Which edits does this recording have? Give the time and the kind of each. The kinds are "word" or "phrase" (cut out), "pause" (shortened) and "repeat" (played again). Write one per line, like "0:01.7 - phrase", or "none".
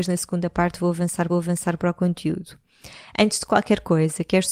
0:01.3 - repeat